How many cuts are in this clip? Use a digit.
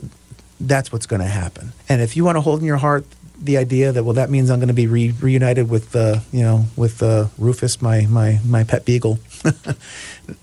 1